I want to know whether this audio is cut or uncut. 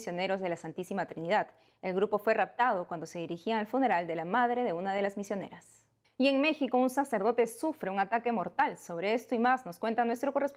cut